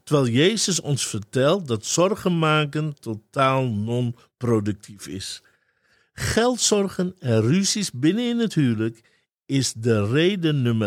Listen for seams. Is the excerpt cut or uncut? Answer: uncut